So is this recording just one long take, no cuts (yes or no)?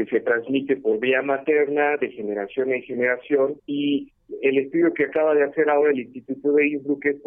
no